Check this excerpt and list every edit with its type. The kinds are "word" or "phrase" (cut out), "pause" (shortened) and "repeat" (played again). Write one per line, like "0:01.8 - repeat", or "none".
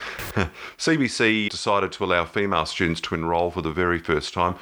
0:01.5 - word